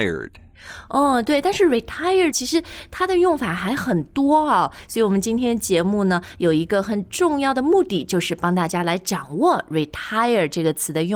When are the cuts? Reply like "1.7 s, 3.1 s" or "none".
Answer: 2.3 s